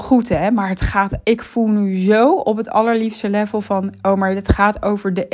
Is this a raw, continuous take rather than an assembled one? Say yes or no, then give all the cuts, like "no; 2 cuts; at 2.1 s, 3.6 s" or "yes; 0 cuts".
no; 1 cut; at 1.2 s